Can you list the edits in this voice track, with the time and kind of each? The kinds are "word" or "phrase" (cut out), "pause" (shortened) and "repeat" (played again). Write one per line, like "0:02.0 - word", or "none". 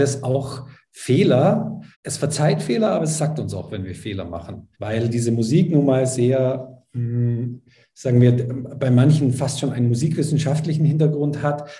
0:01.9 - pause
0:04.7 - pause